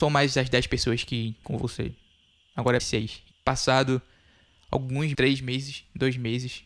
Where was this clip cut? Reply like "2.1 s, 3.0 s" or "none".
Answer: 1.4 s, 2.8 s, 3.3 s, 5.1 s